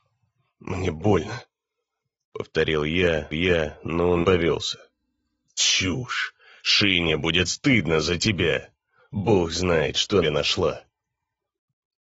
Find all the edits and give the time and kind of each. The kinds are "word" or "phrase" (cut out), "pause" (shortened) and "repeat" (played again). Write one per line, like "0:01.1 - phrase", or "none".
0:03.3 - repeat
0:04.2 - word
0:10.2 - phrase